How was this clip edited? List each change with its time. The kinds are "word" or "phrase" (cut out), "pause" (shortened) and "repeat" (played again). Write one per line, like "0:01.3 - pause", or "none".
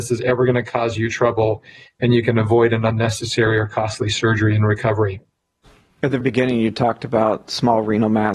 0:06.2 - word